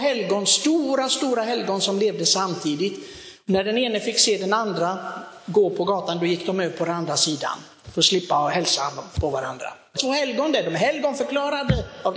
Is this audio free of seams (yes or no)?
no